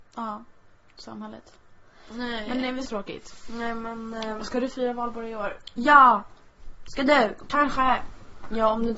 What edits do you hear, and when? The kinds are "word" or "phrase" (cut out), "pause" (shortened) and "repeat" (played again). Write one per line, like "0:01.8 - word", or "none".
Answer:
0:02.8 - phrase